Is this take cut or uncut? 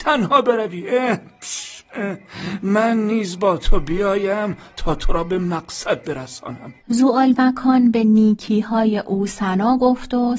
cut